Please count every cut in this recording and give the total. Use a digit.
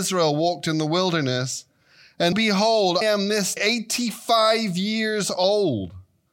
3